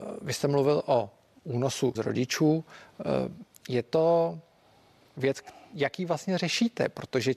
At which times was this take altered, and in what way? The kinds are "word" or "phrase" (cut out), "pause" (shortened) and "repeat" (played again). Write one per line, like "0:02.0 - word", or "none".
0:02.0 - word